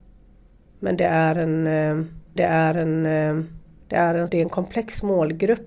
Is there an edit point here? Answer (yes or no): yes